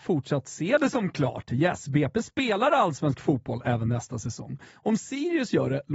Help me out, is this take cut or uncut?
uncut